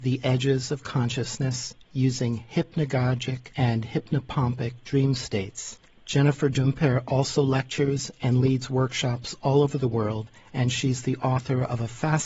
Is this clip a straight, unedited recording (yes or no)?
no